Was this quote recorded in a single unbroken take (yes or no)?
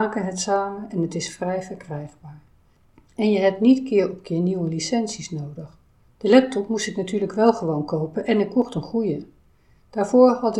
yes